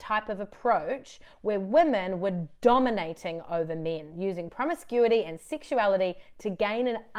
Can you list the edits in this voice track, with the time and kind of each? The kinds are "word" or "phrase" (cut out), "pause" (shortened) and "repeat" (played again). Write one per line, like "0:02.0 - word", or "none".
none